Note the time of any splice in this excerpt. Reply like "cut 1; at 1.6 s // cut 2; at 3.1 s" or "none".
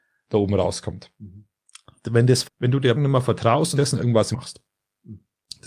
cut 1; at 2.4 s // cut 2; at 2.9 s // cut 3; at 3.7 s // cut 4; at 4.3 s